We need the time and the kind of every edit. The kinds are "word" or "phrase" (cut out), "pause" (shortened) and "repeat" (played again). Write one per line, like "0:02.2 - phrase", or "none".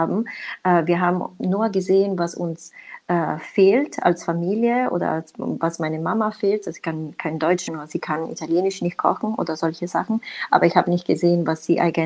0:07.7 - word